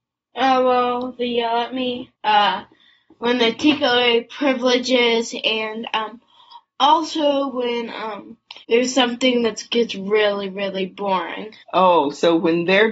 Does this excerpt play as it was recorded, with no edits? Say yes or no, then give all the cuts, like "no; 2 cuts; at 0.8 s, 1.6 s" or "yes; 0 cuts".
no; 3 cuts; at 2.2 s, 8.6 s, 11.6 s